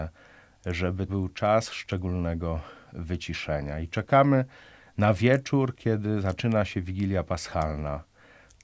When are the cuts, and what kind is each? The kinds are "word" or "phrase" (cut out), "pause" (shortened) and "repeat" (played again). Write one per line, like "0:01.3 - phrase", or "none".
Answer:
0:01.1 - word

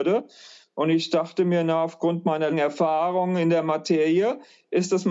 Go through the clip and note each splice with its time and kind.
0:02.5 - word

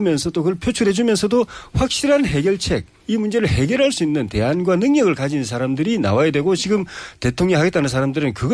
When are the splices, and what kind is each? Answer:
0:03.0 - pause

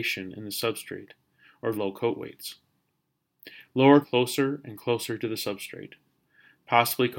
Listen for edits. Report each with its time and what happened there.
0:01.7 - word
0:04.0 - phrase

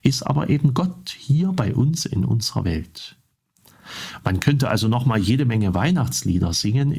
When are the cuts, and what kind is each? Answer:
none

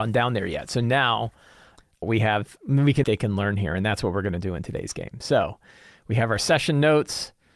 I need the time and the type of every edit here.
0:02.0 - word
0:03.0 - phrase

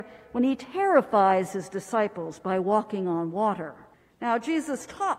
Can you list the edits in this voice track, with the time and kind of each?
0:03.9 - pause

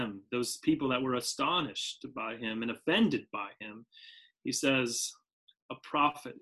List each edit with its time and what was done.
none

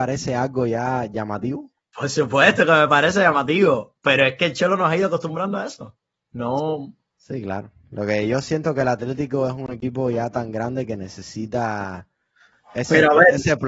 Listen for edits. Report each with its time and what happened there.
none

